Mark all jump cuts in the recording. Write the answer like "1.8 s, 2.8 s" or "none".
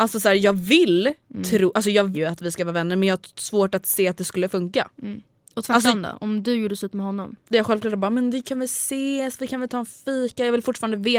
2.1 s, 7.5 s